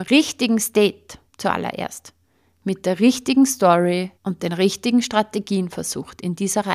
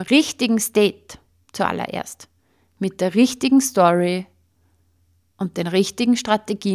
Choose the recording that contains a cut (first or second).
first